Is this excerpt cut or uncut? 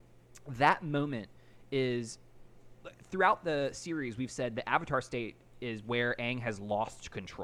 uncut